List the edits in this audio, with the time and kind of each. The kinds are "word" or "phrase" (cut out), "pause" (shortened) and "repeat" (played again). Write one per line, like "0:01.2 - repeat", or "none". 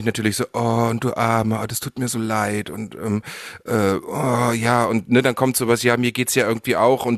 none